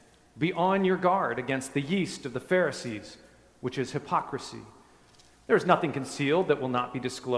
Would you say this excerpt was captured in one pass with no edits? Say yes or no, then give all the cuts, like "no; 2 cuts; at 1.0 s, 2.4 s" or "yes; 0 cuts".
yes; 0 cuts